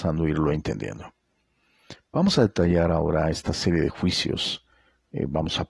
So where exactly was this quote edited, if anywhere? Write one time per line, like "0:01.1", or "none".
none